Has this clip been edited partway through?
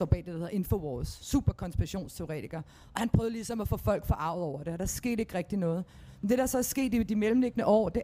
no; 0 cuts

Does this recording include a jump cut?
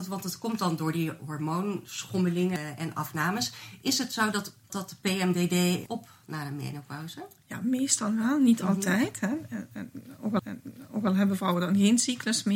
yes; 3 cuts; at 4.7 s, 5.9 s, 10.4 s

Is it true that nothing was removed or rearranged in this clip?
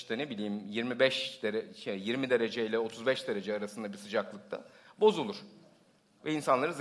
yes; 0 cuts

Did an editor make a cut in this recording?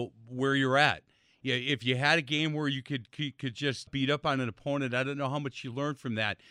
yes; 1 cut; at 3.9 s

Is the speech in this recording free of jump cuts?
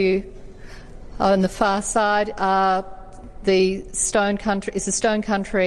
yes; 0 cuts

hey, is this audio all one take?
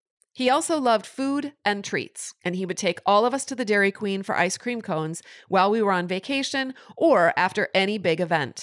yes; 0 cuts

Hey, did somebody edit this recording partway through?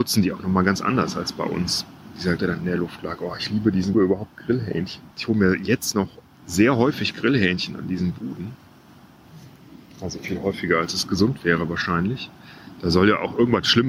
yes; 3 cuts; at 2.4 s, 3.9 s, 5.1 s

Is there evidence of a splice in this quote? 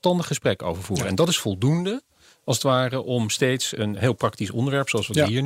no; 0 cuts

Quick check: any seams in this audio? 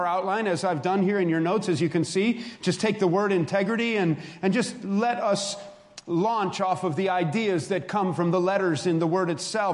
no; 0 cuts

